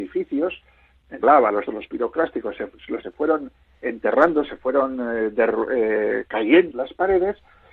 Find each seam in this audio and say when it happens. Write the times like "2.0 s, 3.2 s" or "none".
1.2 s, 1.7 s, 3.0 s, 6.7 s